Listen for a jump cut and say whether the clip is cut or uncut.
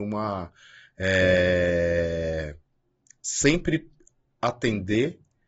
uncut